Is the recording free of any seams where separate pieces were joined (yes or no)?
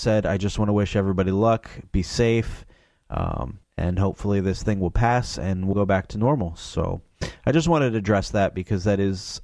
no